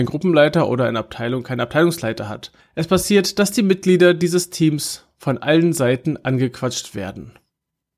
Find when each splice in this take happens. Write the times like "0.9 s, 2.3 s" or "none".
2.6 s